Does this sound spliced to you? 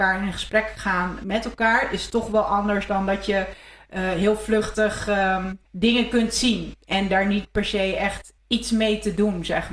yes; 2 cuts; at 5.6 s, 8.4 s

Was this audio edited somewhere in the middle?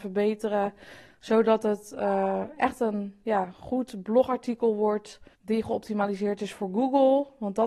yes; 1 cut; at 5.3 s

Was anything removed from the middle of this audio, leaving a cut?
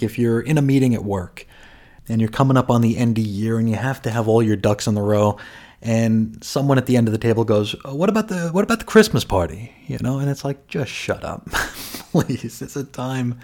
no; 0 cuts

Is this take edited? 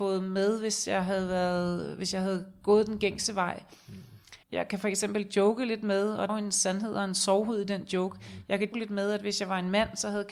yes; 3 cuts; at 4.4 s, 6.3 s, 8.7 s

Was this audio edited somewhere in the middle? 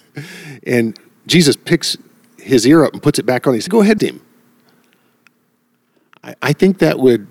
yes; 2 cuts; at 3.7 s, 4.0 s

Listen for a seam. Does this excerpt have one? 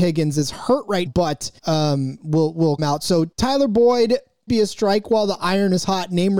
yes; 5 cuts; at 1.1 s, 1.6 s, 2.8 s, 3.3 s, 4.5 s

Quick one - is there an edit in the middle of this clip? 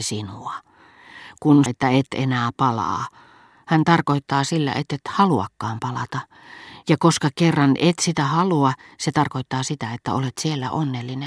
yes; 1 cut; at 1.7 s

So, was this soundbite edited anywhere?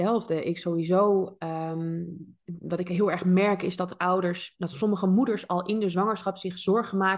no; 0 cuts

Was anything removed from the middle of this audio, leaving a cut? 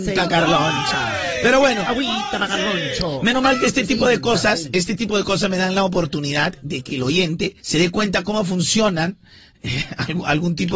yes; 2 cuts; at 6.9 s, 7.6 s

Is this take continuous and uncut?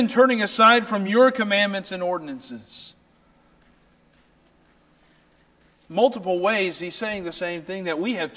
yes; 0 cuts

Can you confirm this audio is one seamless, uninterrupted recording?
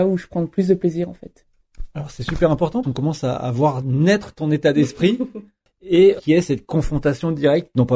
no; 2 cuts; at 2.8 s, 6.2 s

